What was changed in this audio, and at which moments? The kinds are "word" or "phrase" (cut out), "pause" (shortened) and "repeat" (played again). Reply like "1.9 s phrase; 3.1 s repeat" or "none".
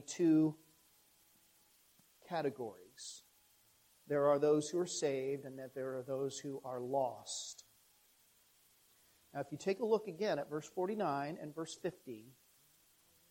none